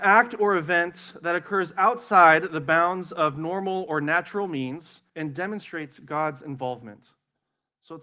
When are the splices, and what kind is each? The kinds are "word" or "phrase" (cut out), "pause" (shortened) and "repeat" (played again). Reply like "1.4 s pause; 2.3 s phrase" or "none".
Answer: 5.1 s pause